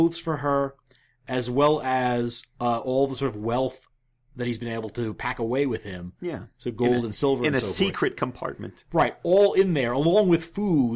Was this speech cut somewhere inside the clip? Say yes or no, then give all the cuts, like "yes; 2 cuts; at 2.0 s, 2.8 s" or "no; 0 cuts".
no; 0 cuts